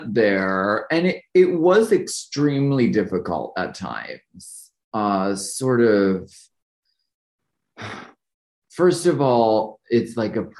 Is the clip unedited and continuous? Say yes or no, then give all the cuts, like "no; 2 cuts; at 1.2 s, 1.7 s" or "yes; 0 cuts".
yes; 0 cuts